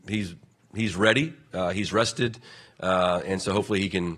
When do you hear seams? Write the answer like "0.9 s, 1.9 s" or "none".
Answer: none